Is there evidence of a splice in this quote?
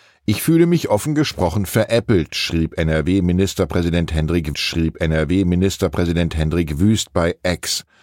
yes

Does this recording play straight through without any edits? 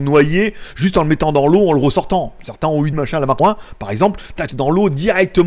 no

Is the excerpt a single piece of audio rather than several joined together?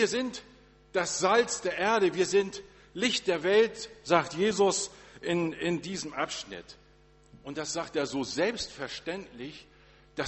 yes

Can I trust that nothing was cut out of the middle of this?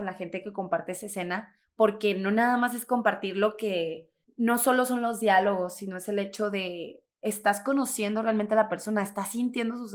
no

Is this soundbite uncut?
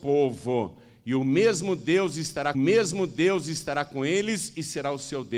no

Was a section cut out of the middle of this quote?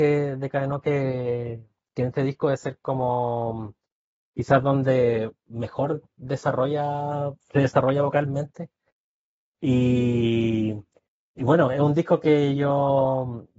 no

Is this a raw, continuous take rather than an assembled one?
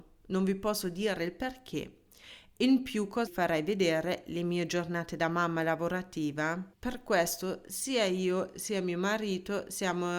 no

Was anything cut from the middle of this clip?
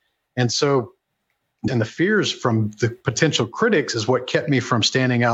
yes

